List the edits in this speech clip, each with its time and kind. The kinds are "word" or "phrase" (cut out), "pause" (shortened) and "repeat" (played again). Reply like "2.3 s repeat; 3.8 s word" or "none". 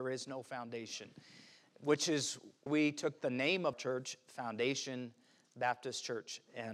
2.7 s word; 3.7 s word